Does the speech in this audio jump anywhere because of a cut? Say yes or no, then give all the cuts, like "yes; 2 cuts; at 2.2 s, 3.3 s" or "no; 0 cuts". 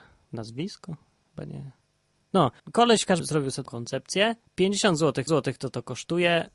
yes; 5 cuts; at 2.6 s, 3.2 s, 3.6 s, 4.5 s, 5.3 s